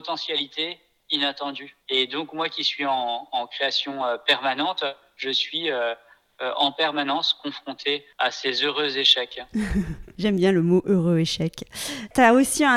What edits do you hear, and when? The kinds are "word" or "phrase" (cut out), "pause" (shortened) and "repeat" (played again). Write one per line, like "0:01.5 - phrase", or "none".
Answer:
none